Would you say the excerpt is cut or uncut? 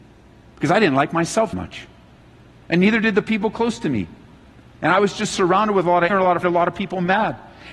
cut